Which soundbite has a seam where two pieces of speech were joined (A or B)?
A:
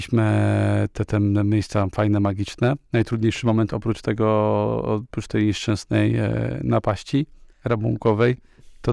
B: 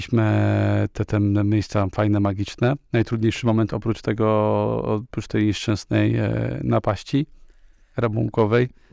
A